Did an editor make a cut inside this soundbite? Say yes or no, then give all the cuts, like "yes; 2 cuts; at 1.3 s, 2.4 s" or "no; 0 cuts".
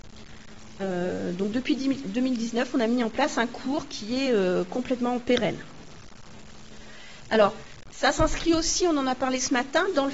no; 0 cuts